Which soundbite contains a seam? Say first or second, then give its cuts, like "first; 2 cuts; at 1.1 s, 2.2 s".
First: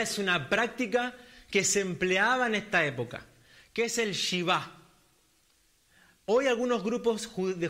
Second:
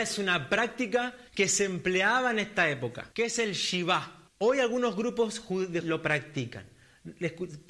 second; 4 cuts; at 1.3 s, 3.1 s, 4.3 s, 5.8 s